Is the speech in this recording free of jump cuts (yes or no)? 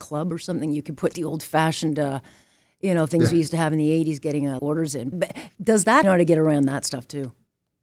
no